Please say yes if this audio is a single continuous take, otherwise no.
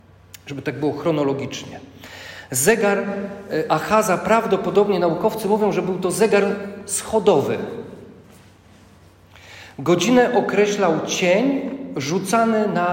yes